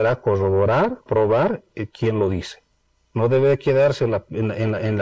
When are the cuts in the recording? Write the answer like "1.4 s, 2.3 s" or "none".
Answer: 1.1 s, 2.8 s